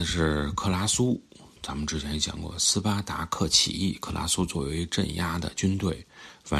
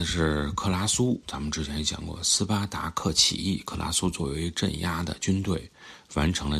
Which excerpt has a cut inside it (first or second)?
second